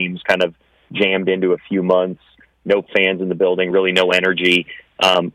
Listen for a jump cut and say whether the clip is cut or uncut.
uncut